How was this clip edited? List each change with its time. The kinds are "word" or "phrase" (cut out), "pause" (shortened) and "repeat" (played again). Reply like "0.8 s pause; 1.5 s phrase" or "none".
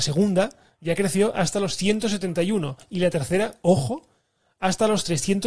none